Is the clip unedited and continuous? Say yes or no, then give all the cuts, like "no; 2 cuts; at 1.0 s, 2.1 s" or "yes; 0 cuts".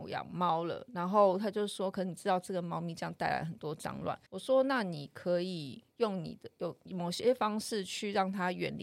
no; 1 cut; at 4.3 s